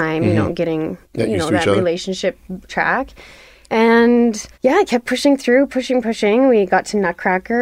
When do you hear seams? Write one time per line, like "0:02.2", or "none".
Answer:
0:01.0
0:02.7
0:04.5

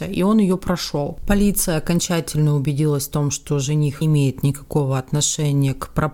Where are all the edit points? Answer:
0:04.0

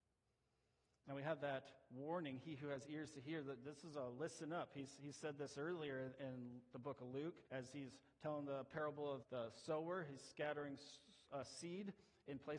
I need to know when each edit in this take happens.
0:07.5
0:09.2

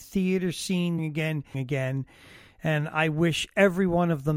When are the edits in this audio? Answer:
0:01.0
0:01.5

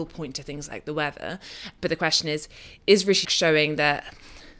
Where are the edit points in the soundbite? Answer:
0:02.8
0:03.2

